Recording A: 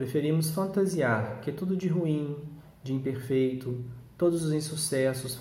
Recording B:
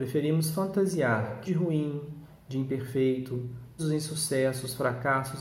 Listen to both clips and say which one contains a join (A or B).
B